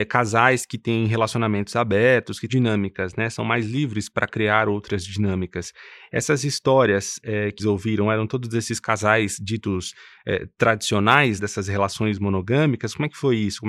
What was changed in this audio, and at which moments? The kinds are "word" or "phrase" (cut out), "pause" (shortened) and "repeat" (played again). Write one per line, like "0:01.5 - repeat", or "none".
0:02.5 - phrase
0:07.6 - word
0:11.4 - word